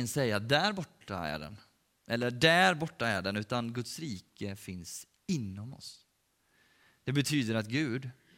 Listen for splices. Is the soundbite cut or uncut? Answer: uncut